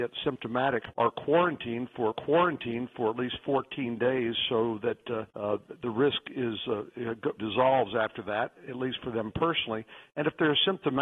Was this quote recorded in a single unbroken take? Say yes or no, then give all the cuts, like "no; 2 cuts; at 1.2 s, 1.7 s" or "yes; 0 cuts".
no; 4 cuts; at 0.9 s, 2.1 s, 5.3 s, 7.4 s